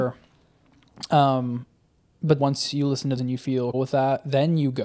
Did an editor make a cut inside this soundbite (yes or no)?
yes